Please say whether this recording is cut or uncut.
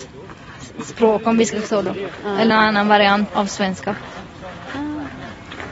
cut